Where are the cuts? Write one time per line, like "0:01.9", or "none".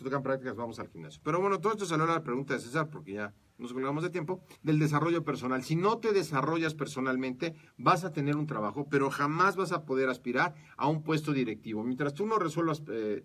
0:04.6